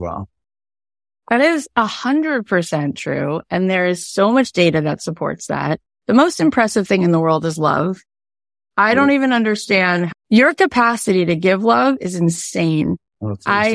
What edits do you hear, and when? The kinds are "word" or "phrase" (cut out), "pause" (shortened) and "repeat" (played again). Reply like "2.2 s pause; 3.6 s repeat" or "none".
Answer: none

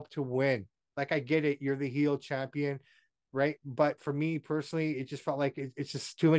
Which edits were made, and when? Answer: none

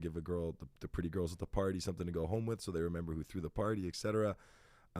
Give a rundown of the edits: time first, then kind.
none

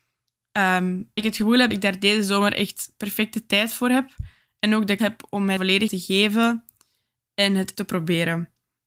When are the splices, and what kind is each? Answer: 1.2 s word; 1.7 s word; 5.0 s word; 5.6 s word; 5.9 s word; 7.7 s word

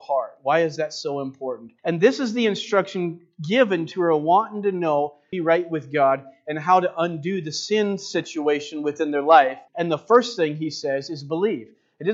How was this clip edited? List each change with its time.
1.8 s pause; 3.9 s word; 5.3 s phrase; 9.7 s pause

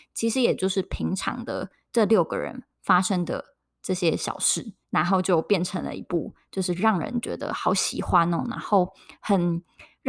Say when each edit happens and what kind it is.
4.8 s pause

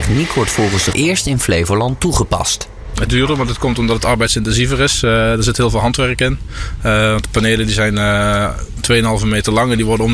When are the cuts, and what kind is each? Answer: 0.9 s phrase; 3.1 s phrase

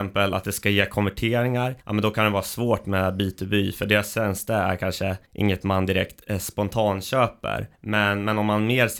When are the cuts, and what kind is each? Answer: 1.8 s pause; 5.2 s pause; 7.7 s pause

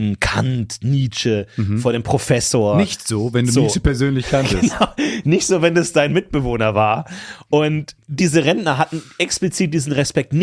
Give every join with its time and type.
none

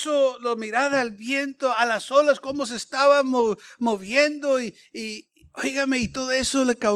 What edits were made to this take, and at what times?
none

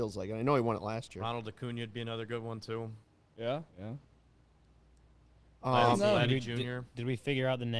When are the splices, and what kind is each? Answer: 3.7 s pause

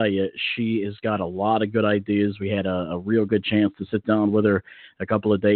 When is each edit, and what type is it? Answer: none

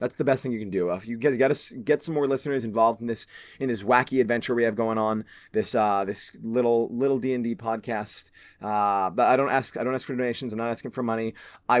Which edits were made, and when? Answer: none

